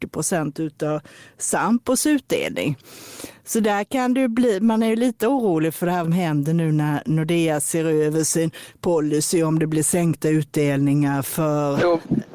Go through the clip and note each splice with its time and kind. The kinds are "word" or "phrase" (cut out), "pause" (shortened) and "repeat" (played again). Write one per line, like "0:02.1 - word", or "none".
0:06.0 - phrase

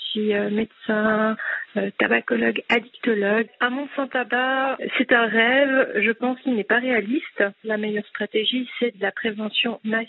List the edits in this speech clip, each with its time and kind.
none

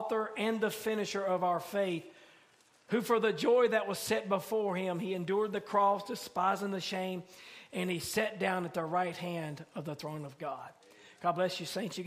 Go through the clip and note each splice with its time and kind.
none

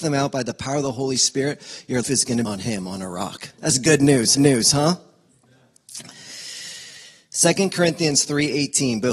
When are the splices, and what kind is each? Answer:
0:02.0 - word
0:02.4 - word
0:03.5 - pause
0:04.4 - repeat

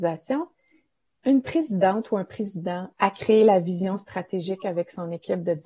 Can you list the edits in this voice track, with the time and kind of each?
0:02.9 - phrase

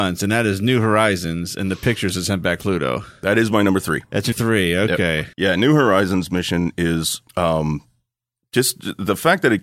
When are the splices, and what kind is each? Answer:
0:02.6 - word
0:04.3 - word
0:05.3 - pause
0:07.3 - pause

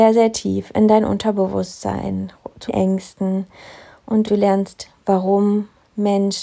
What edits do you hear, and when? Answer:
0:02.7 - word
0:04.3 - word

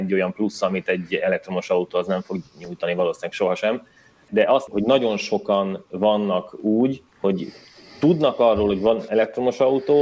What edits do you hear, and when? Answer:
0:04.3 - word
0:04.7 - phrase
0:07.1 - pause

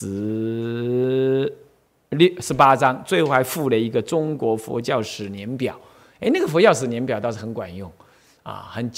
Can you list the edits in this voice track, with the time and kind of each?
none

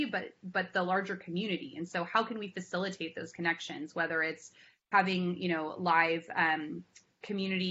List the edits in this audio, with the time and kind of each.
none

